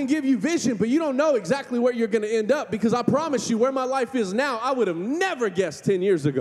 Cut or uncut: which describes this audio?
uncut